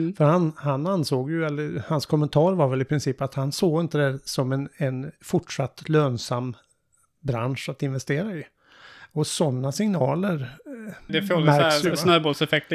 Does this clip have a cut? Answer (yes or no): yes